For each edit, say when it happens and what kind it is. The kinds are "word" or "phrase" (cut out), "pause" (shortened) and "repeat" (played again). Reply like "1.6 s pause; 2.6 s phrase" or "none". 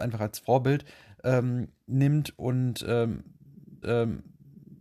3.8 s repeat